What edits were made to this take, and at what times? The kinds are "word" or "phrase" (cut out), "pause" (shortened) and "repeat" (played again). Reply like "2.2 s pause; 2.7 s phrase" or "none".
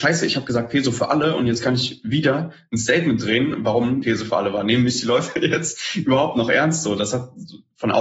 4.0 s phrase